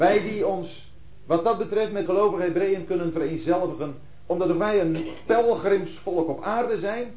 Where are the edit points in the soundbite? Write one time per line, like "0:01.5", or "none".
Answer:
0:02.1